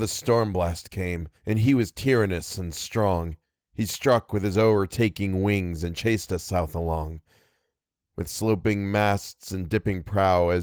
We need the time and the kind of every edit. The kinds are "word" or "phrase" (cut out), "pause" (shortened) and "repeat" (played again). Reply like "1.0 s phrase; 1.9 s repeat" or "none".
1.4 s pause; 3.4 s pause